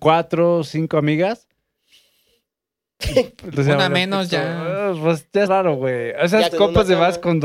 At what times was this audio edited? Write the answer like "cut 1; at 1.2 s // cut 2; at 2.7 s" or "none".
cut 1; at 3.5 s // cut 2; at 5.5 s // cut 3; at 6.5 s